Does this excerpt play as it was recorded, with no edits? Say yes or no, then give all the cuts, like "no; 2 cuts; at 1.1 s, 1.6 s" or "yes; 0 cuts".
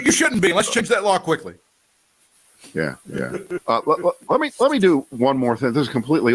no; 1 cut; at 3.0 s